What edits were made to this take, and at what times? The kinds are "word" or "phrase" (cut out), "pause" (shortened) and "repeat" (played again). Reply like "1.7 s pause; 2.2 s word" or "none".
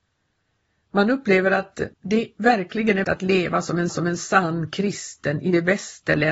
1.9 s pause; 3.0 s phrase; 3.9 s repeat